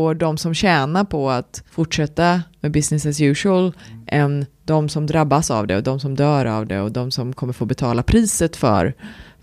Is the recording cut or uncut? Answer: cut